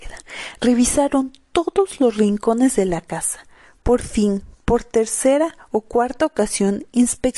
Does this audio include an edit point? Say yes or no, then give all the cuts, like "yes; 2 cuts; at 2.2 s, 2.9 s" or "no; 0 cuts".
no; 0 cuts